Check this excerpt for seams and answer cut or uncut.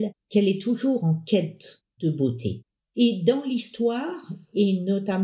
uncut